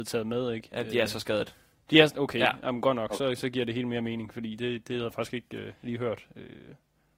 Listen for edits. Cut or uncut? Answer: uncut